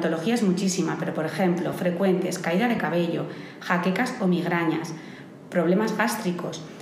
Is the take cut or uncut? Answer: uncut